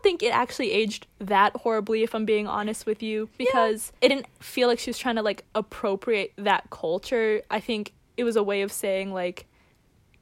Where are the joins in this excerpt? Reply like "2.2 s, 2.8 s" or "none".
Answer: 3.4 s, 4.0 s